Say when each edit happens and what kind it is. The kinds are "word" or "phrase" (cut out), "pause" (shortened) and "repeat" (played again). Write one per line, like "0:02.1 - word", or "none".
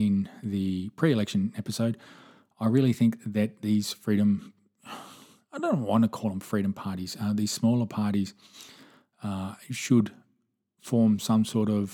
none